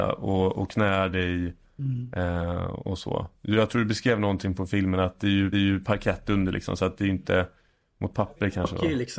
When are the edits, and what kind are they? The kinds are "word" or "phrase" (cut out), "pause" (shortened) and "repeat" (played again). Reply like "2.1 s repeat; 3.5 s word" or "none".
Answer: 3.4 s pause; 5.5 s repeat